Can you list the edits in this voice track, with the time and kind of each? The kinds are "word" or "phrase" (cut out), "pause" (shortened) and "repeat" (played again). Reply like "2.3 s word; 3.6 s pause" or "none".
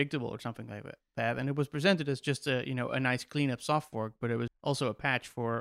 4.5 s word